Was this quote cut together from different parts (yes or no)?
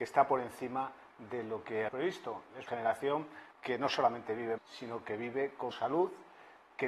yes